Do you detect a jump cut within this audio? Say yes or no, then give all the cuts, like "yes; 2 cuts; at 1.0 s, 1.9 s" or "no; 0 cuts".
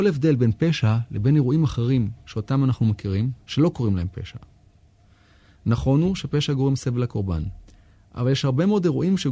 no; 0 cuts